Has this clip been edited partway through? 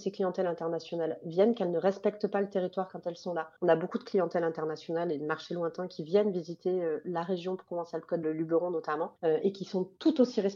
yes; 3 cuts; at 3.6 s, 8.2 s, 9.2 s

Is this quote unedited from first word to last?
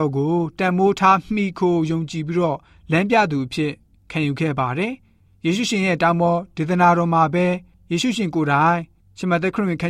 yes; 0 cuts

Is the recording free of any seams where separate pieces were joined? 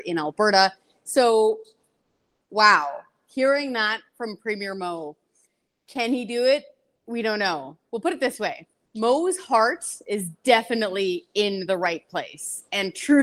yes; 0 cuts

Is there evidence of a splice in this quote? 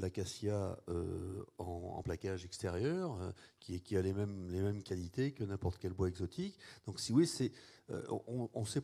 no; 0 cuts

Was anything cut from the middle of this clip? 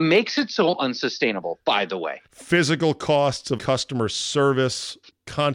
yes; 2 cuts; at 2.3 s, 3.6 s

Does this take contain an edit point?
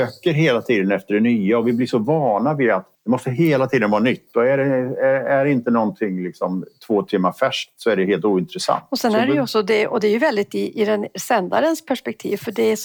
yes; 1 cut; at 3.0 s

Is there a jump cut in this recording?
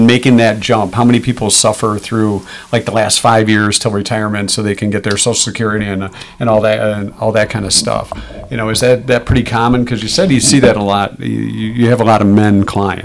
no; 0 cuts

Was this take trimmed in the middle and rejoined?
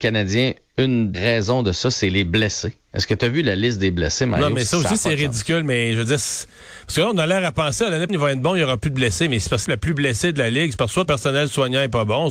yes; 4 cuts; at 1.1 s, 8.1 s, 9.6 s, 11.1 s

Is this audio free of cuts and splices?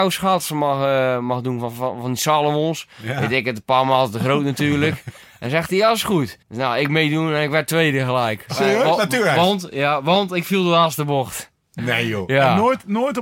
no; 1 cut; at 6.4 s

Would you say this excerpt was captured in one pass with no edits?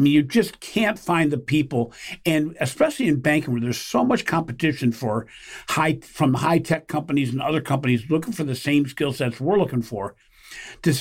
yes; 0 cuts

